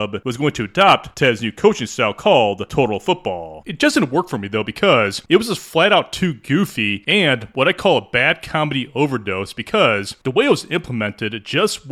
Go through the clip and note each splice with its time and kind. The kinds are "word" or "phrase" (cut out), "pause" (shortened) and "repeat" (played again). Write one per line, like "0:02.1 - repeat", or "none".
none